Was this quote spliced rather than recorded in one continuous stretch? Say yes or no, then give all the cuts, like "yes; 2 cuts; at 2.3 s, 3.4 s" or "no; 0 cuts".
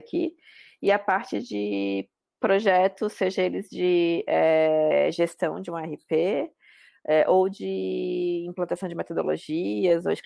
no; 0 cuts